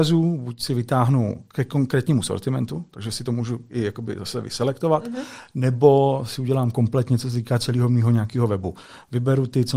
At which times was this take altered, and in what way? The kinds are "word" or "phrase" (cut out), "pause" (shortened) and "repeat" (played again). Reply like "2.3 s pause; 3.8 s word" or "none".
none

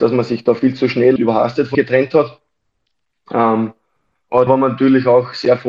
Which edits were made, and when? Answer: 1.2 s word; 1.7 s word; 4.5 s word

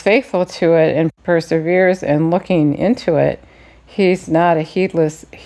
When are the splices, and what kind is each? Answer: none

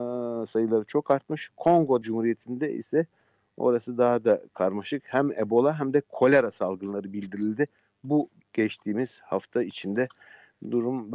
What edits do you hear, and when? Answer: 2.0 s word

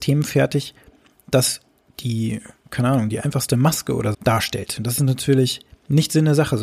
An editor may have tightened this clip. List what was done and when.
4.1 s word

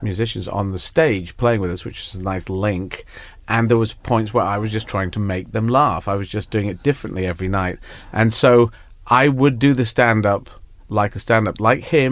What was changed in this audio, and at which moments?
none

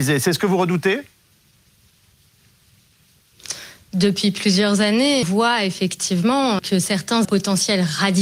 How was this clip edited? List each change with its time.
5.2 s word; 6.6 s word; 7.2 s phrase

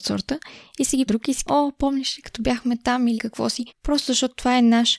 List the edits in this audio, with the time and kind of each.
1.1 s phrase; 1.5 s word; 3.2 s word; 3.7 s pause

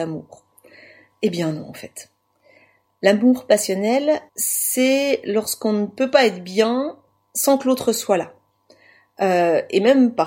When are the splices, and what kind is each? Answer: 4.3 s pause

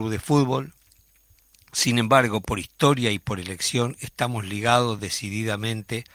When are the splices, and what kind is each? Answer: none

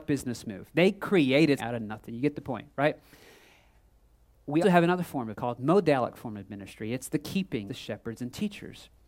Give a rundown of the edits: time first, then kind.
1.6 s word; 4.6 s word; 5.3 s phrase; 7.7 s phrase

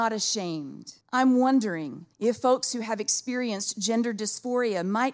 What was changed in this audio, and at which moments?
1.0 s pause; 2.1 s pause

